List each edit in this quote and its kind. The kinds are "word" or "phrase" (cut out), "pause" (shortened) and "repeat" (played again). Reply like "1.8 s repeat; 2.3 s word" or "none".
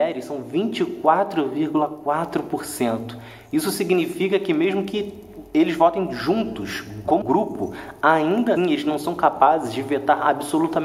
7.2 s word; 8.6 s word